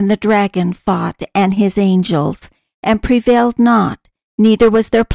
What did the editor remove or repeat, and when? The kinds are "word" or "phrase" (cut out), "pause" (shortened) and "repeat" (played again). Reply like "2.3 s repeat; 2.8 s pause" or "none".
none